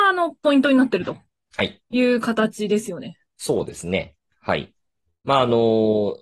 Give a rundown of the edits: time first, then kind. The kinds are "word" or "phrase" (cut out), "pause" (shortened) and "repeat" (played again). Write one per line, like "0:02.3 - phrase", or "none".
0:01.8 - pause